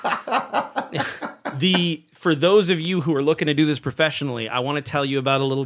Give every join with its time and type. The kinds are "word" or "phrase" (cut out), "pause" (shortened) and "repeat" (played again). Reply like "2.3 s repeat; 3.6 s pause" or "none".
none